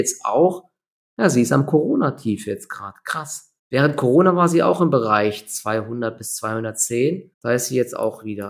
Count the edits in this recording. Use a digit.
2